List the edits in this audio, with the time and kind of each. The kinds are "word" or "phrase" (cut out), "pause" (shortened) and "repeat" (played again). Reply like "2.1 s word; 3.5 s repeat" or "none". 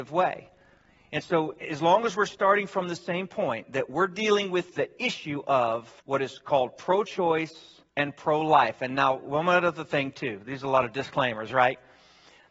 6.0 s pause; 7.9 s pause